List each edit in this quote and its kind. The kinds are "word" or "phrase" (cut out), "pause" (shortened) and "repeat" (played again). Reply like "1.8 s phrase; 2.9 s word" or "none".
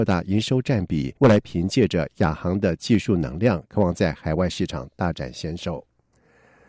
1.2 s pause